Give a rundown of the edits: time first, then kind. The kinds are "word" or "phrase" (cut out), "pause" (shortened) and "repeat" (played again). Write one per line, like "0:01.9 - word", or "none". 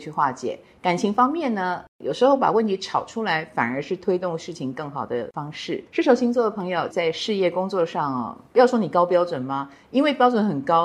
0:05.9 - pause
0:06.9 - phrase